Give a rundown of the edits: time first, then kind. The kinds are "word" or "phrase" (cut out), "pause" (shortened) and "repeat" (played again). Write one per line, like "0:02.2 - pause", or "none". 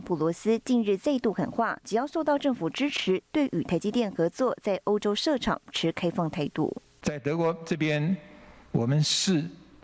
none